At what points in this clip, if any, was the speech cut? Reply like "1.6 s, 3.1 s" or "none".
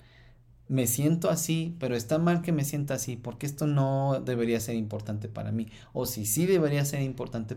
none